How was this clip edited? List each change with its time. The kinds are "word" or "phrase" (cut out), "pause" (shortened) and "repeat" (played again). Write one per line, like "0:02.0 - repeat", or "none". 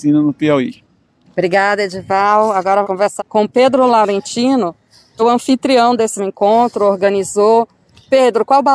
0:02.8 - word
0:03.2 - word
0:05.2 - word
0:06.2 - word